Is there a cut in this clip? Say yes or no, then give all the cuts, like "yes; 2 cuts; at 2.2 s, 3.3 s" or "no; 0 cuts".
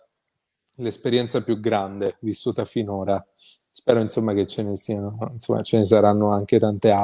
no; 0 cuts